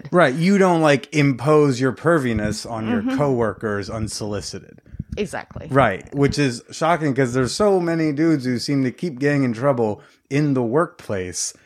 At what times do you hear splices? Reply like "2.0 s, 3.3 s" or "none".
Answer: none